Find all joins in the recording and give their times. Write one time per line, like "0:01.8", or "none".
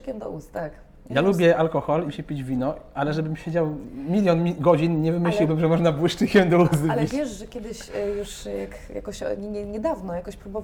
0:02.1
0:09.4